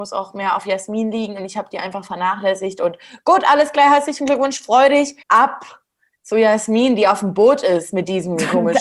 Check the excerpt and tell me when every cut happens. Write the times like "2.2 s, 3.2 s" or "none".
5.2 s

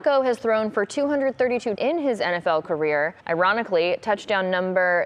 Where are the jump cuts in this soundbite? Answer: 1.8 s, 3.2 s

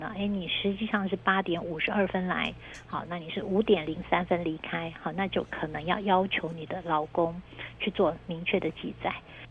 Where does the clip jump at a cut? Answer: none

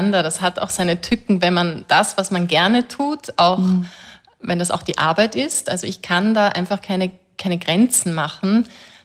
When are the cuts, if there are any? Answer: none

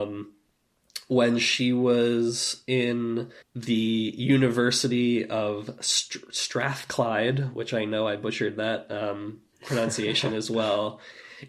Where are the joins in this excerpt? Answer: 3.4 s

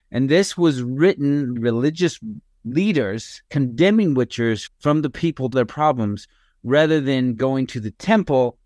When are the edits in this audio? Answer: 1.6 s, 3.5 s, 4.7 s, 5.5 s

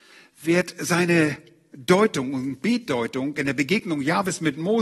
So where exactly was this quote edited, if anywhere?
none

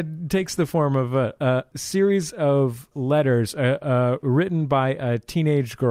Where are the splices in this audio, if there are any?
1.7 s, 2.9 s

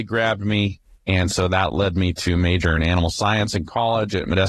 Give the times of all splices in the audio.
none

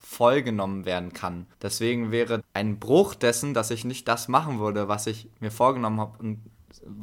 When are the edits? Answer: 1.5 s, 2.4 s

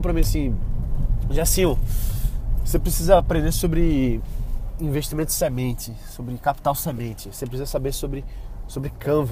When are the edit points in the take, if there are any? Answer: none

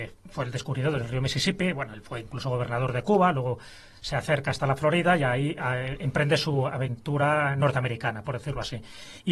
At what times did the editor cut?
none

